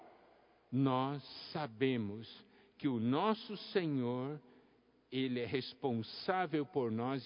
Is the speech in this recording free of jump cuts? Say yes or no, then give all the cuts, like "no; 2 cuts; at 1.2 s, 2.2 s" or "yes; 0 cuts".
yes; 0 cuts